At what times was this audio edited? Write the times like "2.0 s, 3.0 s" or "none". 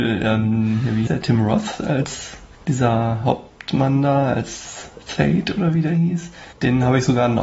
1.1 s, 2.5 s, 6.5 s